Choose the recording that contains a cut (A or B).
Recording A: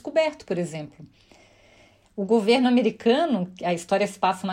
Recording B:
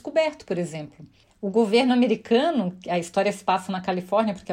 B